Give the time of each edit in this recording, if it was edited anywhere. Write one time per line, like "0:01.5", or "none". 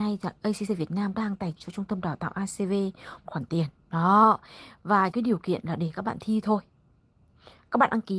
0:01.1
0:01.6
0:03.3
0:03.8
0:05.1

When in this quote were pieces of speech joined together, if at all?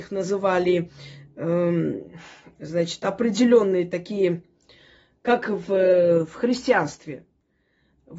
none

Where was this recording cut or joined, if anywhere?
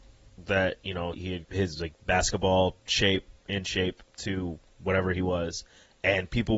0:01.1
0:01.4

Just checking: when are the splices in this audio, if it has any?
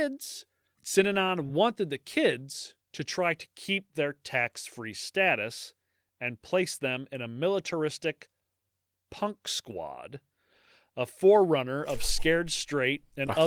none

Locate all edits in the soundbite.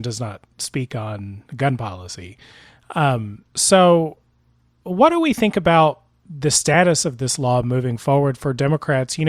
0:01.5
0:03.5

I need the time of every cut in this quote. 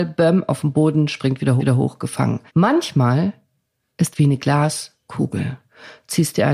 0:01.6
0:02.5
0:04.1

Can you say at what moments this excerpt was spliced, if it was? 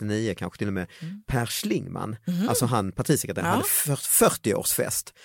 none

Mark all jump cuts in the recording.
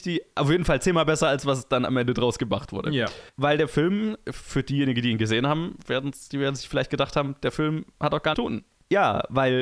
0:03.3
0:08.3

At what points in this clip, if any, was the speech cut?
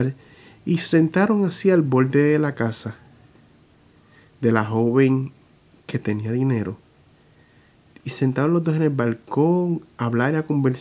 none

